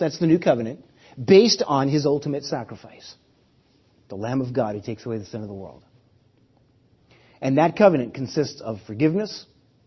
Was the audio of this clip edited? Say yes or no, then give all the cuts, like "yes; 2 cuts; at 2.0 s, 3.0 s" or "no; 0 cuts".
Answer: no; 0 cuts